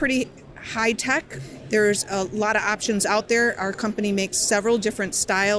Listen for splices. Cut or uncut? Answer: uncut